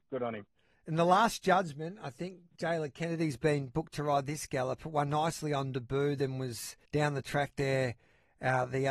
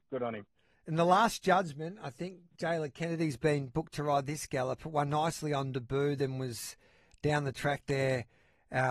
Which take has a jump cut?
first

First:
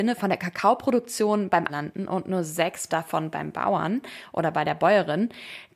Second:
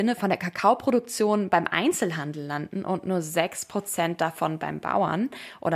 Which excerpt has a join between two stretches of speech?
first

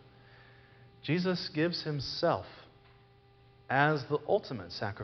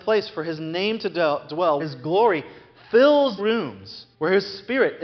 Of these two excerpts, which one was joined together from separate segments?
second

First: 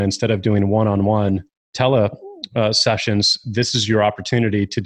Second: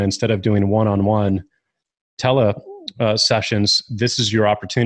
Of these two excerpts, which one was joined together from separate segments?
first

